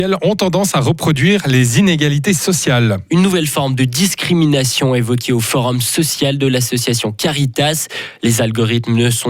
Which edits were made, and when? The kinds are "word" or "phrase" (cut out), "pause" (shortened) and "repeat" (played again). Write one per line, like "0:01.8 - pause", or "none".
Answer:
none